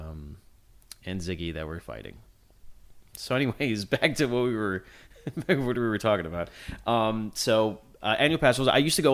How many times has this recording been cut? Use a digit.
0